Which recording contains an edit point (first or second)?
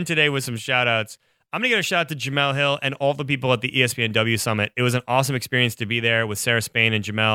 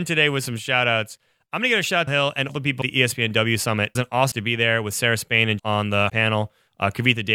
second